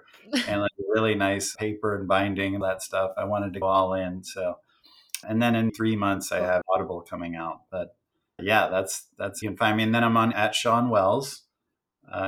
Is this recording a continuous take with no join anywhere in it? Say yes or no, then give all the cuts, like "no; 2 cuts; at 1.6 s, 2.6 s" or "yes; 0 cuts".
no; 9 cuts; at 1.6 s, 2.6 s, 3.6 s, 5.2 s, 5.7 s, 6.6 s, 8.4 s, 9.4 s, 10.3 s